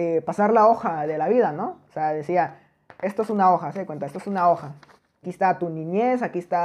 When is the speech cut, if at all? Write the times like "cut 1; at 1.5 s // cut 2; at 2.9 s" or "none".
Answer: cut 1; at 5.2 s